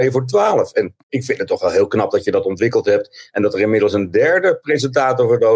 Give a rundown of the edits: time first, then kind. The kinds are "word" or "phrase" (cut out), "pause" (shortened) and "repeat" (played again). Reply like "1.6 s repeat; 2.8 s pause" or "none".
1.0 s pause